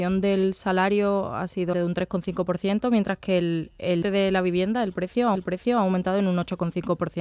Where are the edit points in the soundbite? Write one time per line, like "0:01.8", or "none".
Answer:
0:01.7
0:04.0
0:05.3